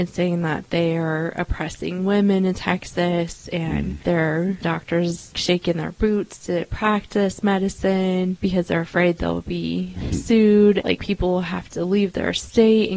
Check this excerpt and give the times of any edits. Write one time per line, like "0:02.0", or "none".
0:04.6
0:05.3
0:10.8